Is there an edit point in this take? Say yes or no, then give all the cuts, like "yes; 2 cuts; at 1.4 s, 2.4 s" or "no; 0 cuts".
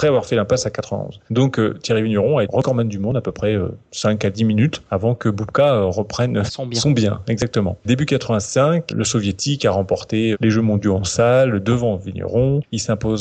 yes; 4 cuts; at 2.4 s, 6.5 s, 8.9 s, 10.3 s